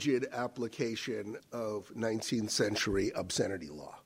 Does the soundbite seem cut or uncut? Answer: cut